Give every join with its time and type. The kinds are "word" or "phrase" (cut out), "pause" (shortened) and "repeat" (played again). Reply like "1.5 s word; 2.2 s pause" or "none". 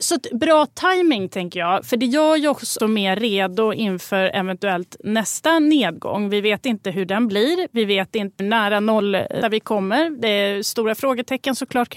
2.8 s word; 8.4 s word; 9.4 s word

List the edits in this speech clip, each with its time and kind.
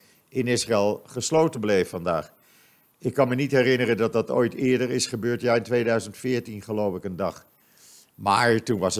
none

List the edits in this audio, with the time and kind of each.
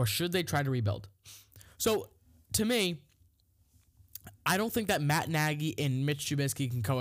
none

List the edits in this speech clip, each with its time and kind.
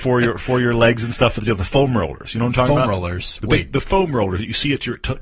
none

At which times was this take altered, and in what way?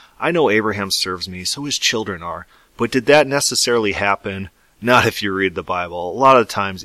none

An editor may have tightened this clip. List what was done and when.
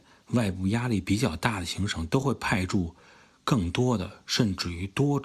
none

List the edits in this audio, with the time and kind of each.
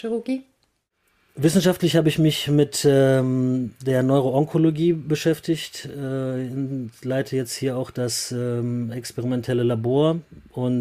none

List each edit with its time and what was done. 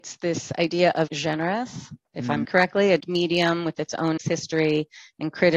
1.1 s word; 2.0 s pause; 2.4 s phrase; 3.0 s word; 4.2 s word

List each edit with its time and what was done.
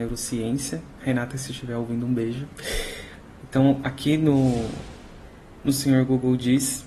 none

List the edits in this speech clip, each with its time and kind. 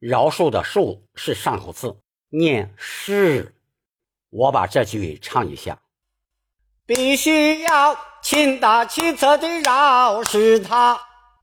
none

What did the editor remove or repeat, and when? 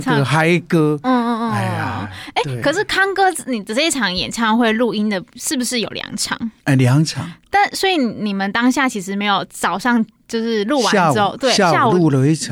6.6 s pause

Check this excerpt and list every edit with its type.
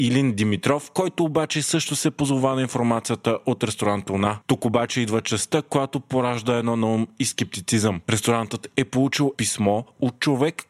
9.3 s word

